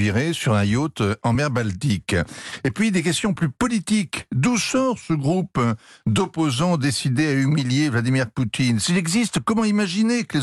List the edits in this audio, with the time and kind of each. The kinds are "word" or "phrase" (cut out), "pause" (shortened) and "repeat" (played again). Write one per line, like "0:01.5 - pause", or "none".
none